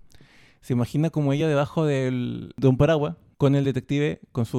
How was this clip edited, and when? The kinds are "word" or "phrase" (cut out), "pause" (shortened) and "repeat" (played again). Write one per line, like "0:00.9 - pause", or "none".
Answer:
none